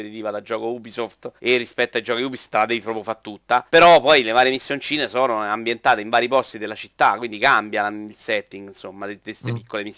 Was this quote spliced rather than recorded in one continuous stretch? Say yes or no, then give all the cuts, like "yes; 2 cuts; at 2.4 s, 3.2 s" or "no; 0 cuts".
yes; 2 cuts; at 1.4 s, 3.7 s